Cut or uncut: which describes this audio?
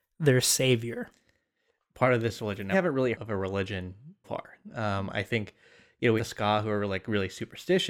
cut